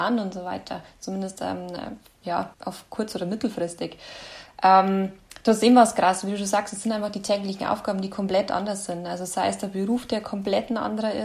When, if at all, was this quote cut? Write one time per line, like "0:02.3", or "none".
0:02.5